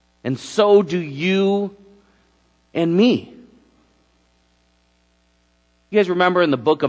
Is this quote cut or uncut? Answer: uncut